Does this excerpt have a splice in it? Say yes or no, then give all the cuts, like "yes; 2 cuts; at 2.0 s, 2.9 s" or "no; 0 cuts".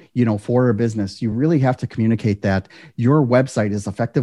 no; 0 cuts